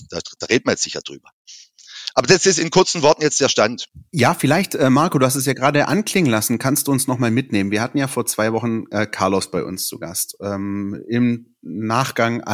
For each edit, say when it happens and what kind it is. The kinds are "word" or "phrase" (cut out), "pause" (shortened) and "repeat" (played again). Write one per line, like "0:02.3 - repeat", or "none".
none

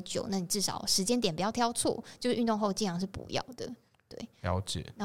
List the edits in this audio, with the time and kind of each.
none

